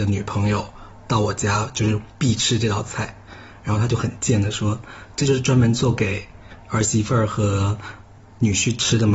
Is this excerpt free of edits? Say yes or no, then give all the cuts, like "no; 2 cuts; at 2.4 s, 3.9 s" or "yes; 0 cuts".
no; 1 cut; at 1.0 s